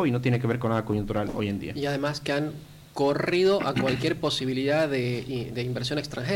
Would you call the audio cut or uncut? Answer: uncut